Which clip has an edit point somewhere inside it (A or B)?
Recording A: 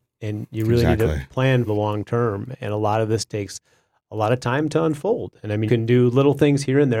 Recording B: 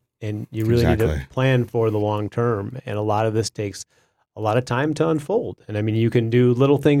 A